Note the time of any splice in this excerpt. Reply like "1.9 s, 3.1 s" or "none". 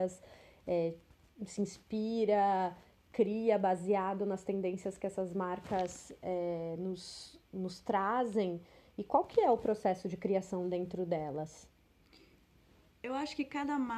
none